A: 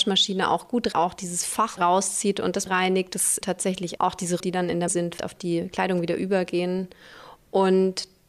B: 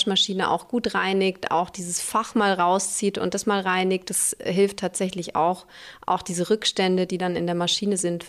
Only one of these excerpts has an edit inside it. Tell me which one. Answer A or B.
A